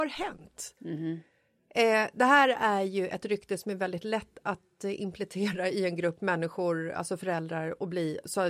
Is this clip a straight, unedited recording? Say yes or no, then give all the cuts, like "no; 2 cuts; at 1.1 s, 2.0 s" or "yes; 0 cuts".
yes; 0 cuts